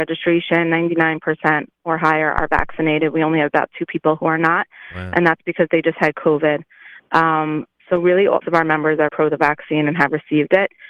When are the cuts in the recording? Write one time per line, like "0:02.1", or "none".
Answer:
0:08.4
0:09.1